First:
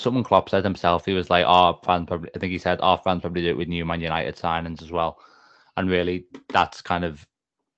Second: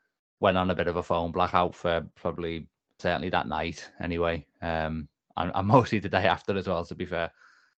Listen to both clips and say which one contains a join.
second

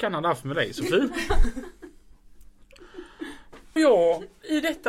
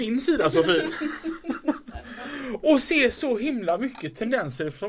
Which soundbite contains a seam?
first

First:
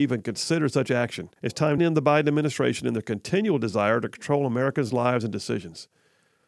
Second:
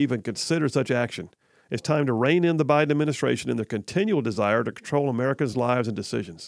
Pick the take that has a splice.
first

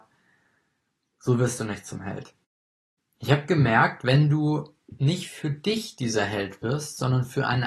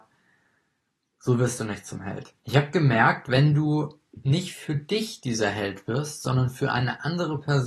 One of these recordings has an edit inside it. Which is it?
second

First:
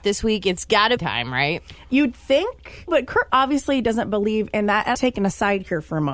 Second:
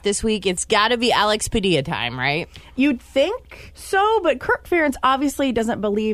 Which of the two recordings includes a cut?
first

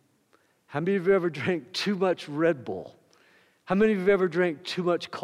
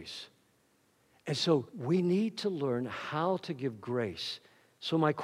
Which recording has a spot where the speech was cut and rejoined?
second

